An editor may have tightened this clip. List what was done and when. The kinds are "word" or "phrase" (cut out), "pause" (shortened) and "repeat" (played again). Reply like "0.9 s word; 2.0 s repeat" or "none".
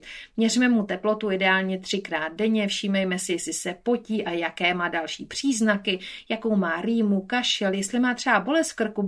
none